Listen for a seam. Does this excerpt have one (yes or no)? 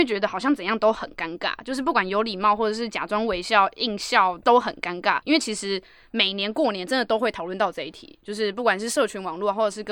no